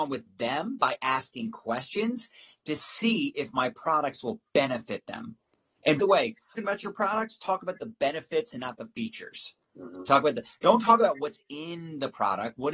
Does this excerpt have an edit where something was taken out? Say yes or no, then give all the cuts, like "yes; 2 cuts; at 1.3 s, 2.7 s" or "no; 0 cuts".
yes; 2 cuts; at 6.0 s, 6.6 s